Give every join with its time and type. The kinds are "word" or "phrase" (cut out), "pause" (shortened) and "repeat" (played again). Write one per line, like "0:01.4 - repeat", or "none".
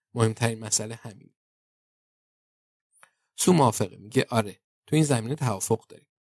none